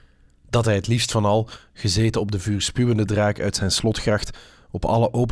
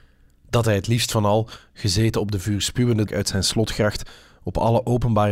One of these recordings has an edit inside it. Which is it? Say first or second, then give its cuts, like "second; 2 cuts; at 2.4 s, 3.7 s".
second; 1 cut; at 3.1 s